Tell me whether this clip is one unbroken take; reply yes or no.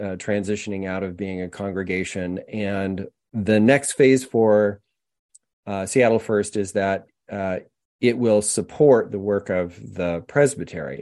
yes